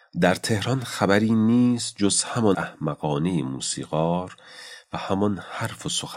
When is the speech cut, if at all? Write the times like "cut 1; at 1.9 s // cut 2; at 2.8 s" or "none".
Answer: cut 1; at 2.5 s